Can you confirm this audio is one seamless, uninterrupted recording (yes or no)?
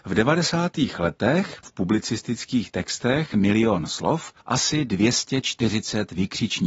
no